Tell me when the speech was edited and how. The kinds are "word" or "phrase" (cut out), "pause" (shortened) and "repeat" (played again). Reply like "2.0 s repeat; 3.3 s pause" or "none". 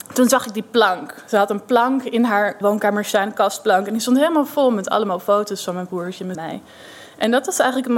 2.6 s word; 6.3 s phrase